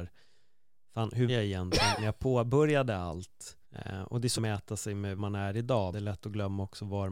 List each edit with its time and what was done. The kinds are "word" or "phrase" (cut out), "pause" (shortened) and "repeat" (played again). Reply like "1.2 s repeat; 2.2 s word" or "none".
1.3 s word; 2.0 s word; 3.6 s pause; 4.4 s phrase; 5.2 s word; 5.9 s word